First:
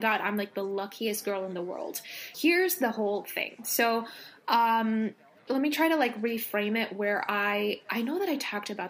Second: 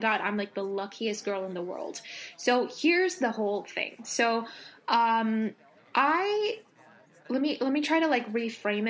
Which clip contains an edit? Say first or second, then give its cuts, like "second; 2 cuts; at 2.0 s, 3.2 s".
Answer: first; 2 cuts; at 2.3 s, 5.5 s